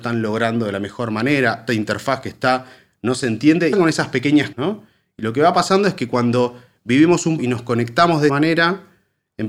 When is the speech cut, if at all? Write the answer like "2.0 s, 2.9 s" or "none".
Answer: 1.7 s, 3.7 s, 4.5 s, 7.4 s, 8.3 s